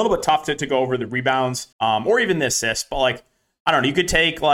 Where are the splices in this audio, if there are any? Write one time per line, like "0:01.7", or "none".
0:01.7